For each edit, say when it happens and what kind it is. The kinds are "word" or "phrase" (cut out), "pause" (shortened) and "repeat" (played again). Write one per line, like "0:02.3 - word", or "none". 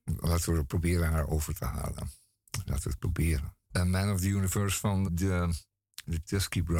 0:03.6 - pause
0:05.0 - word